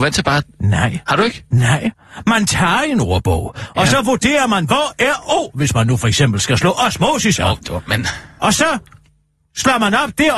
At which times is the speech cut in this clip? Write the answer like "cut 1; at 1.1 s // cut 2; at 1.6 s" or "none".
cut 1; at 1.0 s